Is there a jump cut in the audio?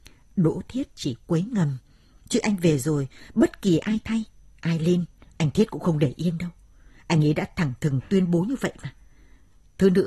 no; 0 cuts

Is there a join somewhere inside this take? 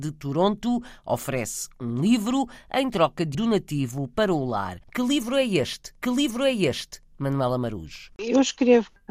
yes; 3 cuts; at 3.3 s, 4.8 s, 6.0 s

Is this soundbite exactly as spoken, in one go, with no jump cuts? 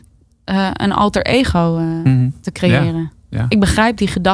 yes; 0 cuts

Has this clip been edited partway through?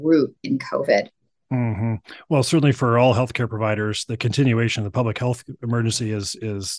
no; 0 cuts

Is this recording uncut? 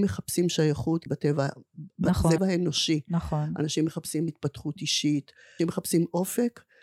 no; 4 cuts; at 1.1 s, 2.4 s, 4.3 s, 5.6 s

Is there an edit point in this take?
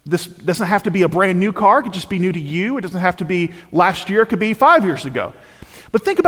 no; 0 cuts

